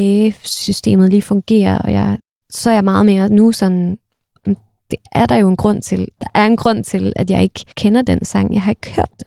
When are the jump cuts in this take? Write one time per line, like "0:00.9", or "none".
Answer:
0:02.3
0:04.8
0:07.7